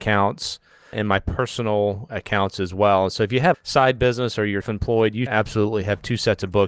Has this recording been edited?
yes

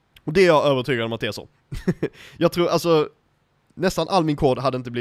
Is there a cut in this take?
no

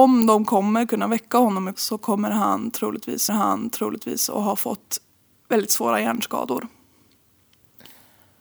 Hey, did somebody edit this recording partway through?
yes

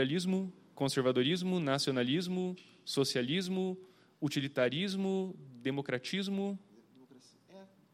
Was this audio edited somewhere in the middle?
no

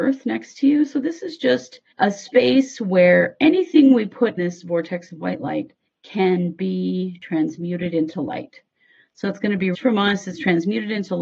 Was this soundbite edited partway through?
yes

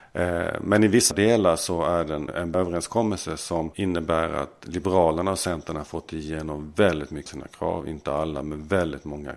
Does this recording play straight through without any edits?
no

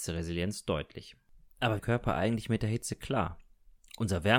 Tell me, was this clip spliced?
yes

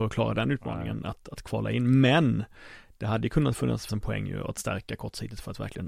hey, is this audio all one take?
no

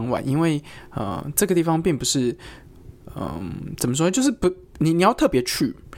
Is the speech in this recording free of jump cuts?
yes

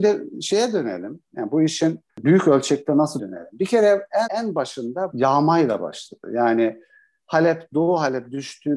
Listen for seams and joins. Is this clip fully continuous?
no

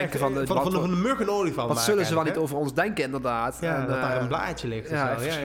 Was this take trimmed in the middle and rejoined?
no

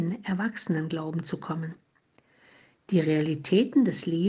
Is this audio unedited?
yes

